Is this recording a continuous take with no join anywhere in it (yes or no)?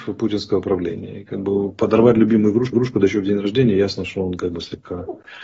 no